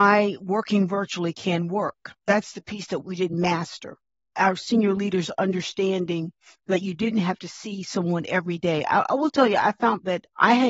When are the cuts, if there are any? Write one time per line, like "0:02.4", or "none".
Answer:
none